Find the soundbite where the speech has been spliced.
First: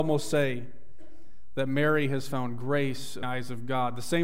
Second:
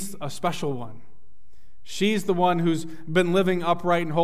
first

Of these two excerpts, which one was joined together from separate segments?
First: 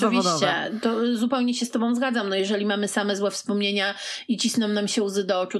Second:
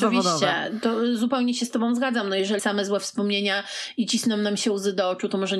second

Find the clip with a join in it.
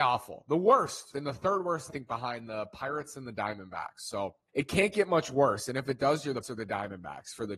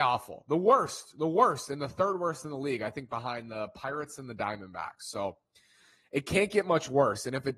first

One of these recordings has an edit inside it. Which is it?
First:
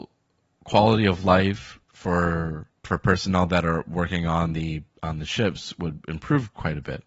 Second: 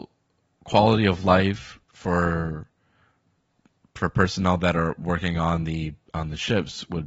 first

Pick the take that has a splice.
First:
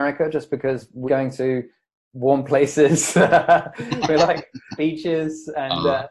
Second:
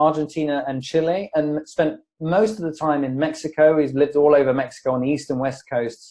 first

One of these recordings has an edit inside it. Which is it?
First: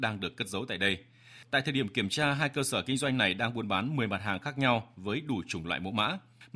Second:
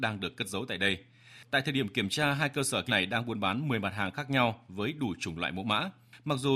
second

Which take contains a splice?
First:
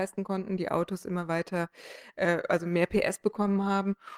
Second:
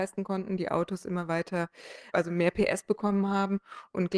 second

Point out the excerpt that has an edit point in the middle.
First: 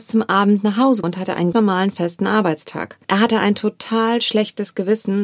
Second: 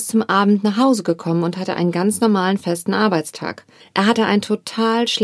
first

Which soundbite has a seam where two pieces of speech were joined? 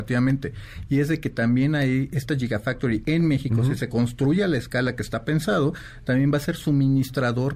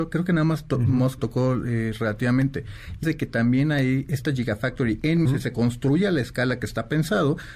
second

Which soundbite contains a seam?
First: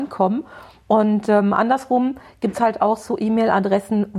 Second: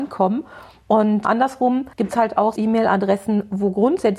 second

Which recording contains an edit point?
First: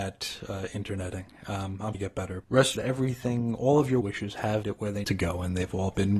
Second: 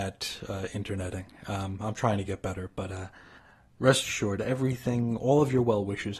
first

